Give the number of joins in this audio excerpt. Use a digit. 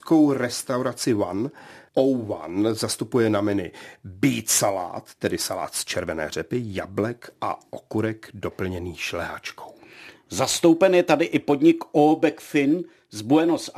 0